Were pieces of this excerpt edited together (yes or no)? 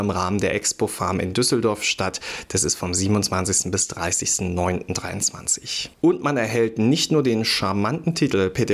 yes